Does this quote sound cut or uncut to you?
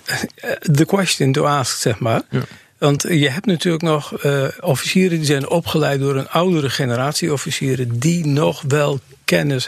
uncut